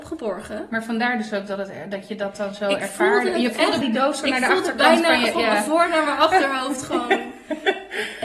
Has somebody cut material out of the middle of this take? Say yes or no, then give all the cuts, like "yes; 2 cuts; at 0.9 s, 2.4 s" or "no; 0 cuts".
yes; 1 cut; at 3.8 s